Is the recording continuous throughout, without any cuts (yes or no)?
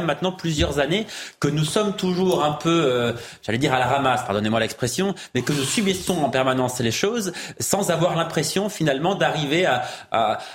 yes